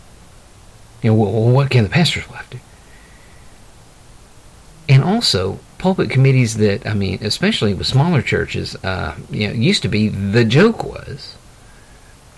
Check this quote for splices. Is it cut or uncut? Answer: uncut